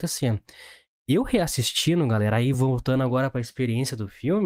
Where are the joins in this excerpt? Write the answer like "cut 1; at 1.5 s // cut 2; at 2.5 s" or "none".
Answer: none